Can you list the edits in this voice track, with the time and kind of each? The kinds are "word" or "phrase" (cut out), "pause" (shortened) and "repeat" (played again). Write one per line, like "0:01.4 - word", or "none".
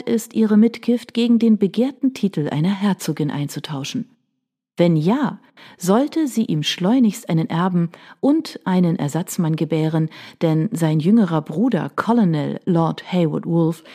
none

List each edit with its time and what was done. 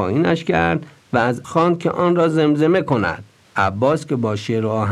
0:01.4 - word
0:03.4 - pause

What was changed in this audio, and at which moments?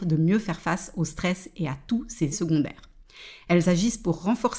0:02.3 - word

